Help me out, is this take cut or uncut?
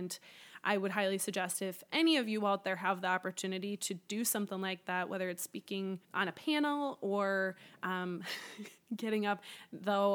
cut